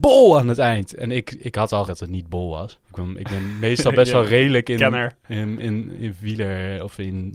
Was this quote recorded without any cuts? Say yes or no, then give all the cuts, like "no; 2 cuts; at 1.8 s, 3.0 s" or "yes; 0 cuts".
no; 2 cuts; at 1.9 s, 2.8 s